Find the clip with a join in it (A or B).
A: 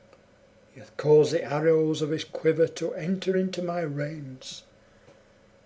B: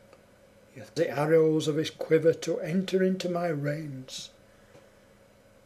B